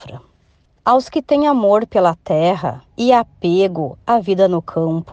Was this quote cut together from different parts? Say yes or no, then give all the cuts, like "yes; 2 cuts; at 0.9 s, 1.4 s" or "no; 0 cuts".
yes; 1 cut; at 2.9 s